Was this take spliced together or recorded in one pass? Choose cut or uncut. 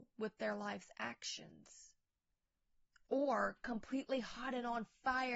uncut